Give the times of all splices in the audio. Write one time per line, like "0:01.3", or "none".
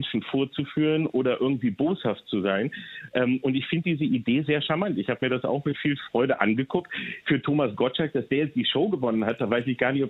none